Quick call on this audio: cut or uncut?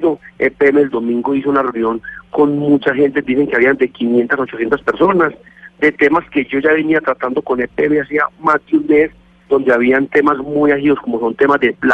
uncut